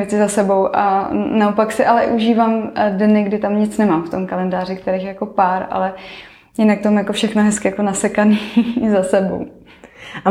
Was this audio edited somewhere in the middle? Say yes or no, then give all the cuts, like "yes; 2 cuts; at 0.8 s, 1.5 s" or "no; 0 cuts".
no; 0 cuts